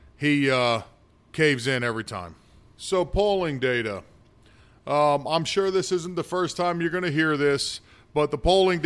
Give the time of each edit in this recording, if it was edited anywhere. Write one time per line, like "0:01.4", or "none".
none